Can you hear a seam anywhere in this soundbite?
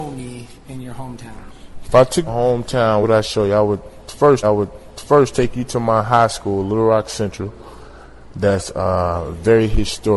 yes; 3 cuts; at 2.3 s, 3.0 s, 4.4 s

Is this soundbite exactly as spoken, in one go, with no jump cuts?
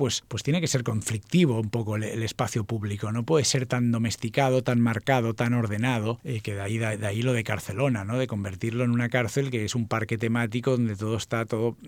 yes; 0 cuts

